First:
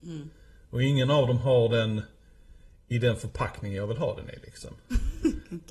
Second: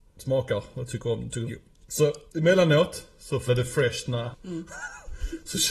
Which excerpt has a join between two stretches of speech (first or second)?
second